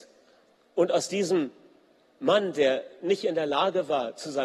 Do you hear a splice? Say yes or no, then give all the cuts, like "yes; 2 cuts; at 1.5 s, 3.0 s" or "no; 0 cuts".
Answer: no; 0 cuts